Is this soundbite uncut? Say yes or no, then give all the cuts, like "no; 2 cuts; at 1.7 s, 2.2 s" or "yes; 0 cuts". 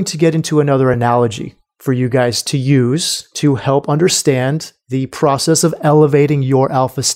yes; 0 cuts